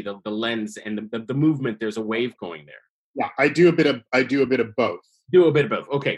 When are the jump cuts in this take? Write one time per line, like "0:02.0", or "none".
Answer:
none